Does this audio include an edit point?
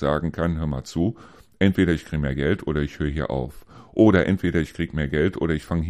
no; 0 cuts

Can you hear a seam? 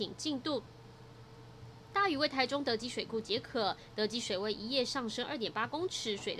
no; 0 cuts

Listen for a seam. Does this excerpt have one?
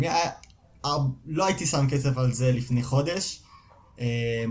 no; 0 cuts

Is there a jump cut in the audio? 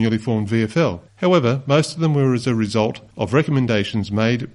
yes; 2 cuts; at 1.1 s, 3.1 s

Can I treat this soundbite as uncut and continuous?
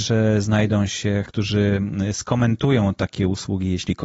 no; 1 cut; at 1.3 s

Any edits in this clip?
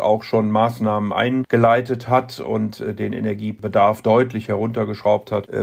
no; 0 cuts

